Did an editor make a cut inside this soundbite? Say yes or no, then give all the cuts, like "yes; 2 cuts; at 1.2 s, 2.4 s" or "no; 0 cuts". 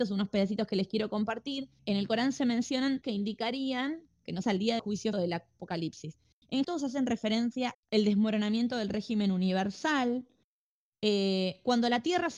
yes; 7 cuts; at 1.8 s, 3.0 s, 4.4 s, 4.8 s, 5.1 s, 6.6 s, 7.7 s